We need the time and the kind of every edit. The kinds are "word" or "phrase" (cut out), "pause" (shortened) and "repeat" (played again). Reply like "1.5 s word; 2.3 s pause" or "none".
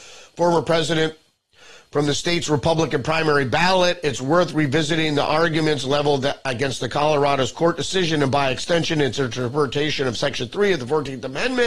none